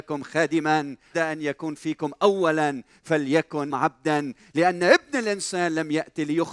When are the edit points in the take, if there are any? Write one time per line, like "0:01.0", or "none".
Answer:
0:01.1
0:03.7